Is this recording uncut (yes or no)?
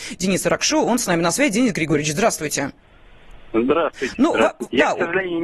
yes